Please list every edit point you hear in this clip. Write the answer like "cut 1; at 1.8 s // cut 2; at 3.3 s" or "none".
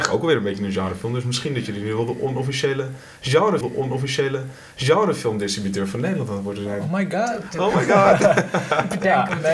cut 1; at 3.6 s